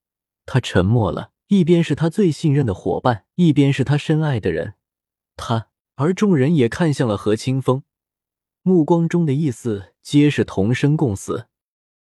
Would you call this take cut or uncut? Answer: cut